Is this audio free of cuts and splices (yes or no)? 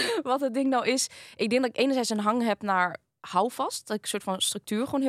yes